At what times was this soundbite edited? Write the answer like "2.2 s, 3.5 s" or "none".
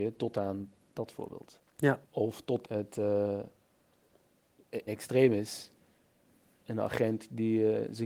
2.0 s, 2.6 s, 4.9 s